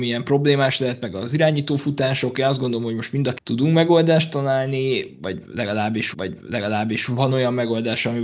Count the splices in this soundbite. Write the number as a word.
two